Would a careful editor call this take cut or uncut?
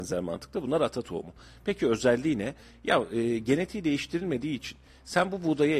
uncut